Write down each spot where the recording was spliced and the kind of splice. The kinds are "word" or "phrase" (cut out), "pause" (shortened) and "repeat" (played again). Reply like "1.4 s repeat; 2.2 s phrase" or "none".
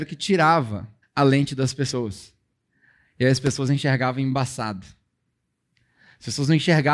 1.0 s pause